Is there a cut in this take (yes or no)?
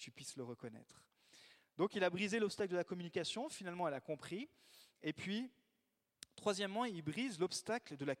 no